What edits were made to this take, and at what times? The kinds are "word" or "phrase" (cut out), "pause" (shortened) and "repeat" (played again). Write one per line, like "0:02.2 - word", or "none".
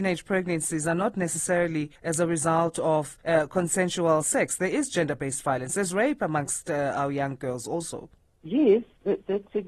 0:02.0 - pause
0:03.2 - pause
0:08.3 - pause